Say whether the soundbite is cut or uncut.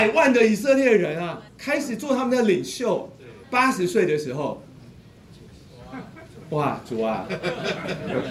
cut